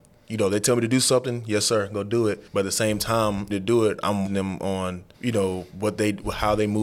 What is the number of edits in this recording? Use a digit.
5